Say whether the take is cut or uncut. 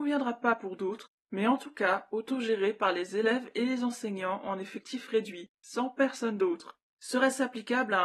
uncut